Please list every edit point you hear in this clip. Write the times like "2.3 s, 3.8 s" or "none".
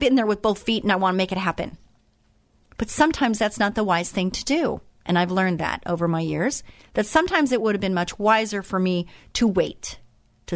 none